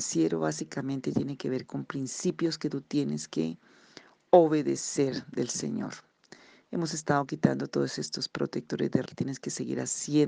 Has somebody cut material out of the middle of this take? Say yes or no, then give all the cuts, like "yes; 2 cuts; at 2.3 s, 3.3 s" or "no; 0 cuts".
yes; 1 cut; at 9.1 s